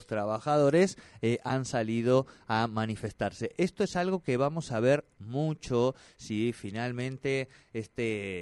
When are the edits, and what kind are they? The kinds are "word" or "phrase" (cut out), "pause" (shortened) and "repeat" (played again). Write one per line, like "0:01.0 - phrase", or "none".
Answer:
none